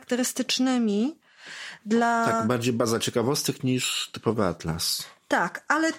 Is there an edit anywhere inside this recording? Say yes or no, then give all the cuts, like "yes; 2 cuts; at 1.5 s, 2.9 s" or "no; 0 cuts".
no; 0 cuts